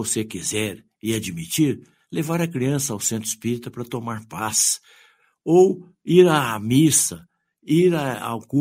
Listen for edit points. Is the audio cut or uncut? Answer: uncut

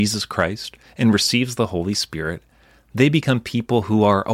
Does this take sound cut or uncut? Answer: uncut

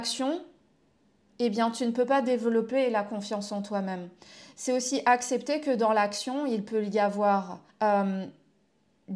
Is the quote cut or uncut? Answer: cut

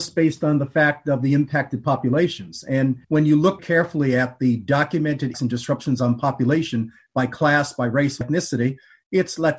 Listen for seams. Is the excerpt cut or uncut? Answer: cut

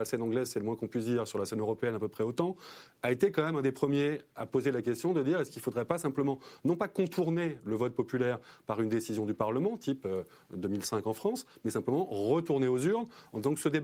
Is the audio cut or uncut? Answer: uncut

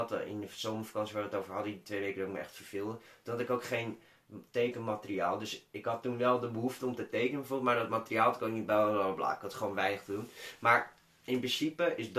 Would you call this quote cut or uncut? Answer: uncut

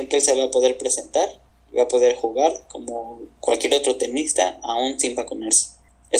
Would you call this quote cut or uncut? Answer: uncut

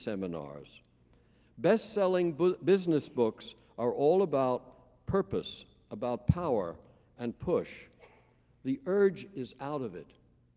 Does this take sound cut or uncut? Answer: uncut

